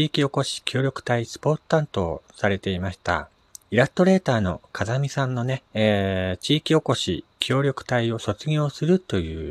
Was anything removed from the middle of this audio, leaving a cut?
yes; 3 cuts; at 3.6 s, 5.7 s, 7.3 s

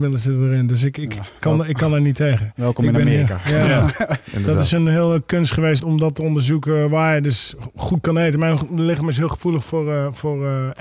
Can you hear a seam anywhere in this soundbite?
yes; 1 cut; at 5.8 s

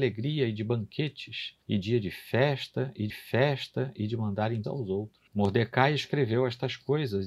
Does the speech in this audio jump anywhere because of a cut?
yes; 4 cuts; at 1.6 s, 3.1 s, 4.6 s, 5.3 s

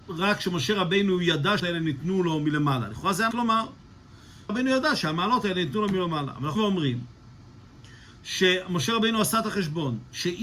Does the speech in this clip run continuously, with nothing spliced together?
no; 4 cuts; at 1.6 s, 3.3 s, 4.5 s, 6.6 s

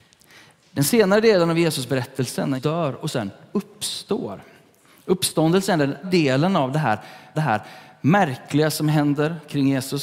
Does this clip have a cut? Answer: yes; 3 cuts; at 2.6 s, 6.0 s, 7.3 s

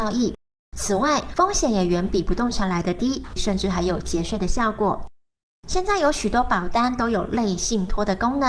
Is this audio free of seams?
no; 1 cut; at 3.4 s

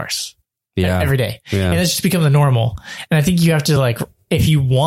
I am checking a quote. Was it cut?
no; 0 cuts

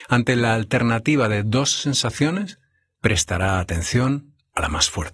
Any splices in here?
no; 0 cuts

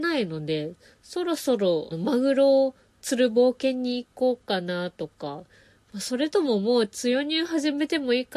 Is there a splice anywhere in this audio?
yes; 1 cut; at 1.9 s

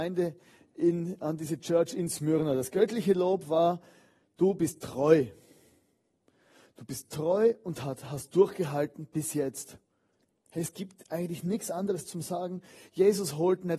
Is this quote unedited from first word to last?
yes; 0 cuts

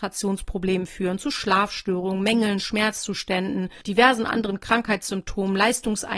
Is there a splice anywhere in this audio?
yes; 1 cut; at 3.8 s

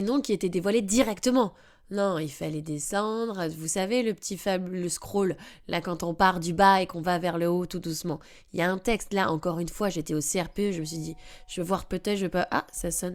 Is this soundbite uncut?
yes; 0 cuts

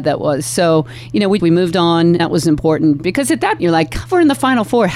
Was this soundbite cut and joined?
yes; 3 cuts; at 1.4 s, 2.2 s, 3.6 s

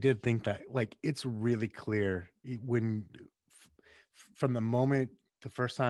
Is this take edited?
no; 0 cuts

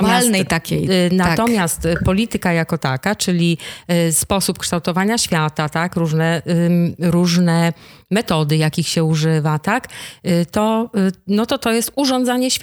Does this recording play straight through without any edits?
yes; 0 cuts

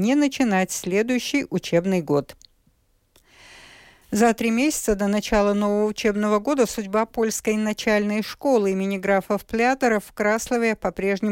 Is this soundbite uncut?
yes; 0 cuts

